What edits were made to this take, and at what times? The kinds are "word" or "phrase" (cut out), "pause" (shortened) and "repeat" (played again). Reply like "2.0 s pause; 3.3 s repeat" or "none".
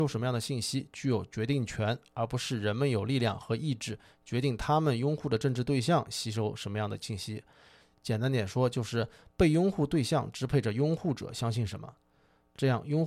none